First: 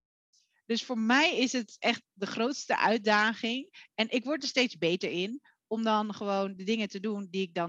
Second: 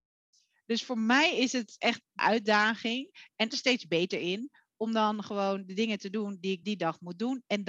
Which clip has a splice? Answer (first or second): second